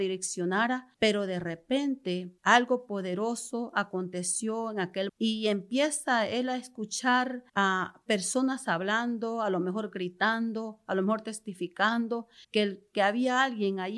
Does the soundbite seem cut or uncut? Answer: cut